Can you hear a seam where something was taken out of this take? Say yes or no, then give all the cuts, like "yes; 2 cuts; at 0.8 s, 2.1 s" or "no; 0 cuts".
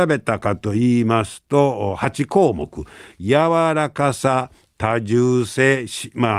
no; 0 cuts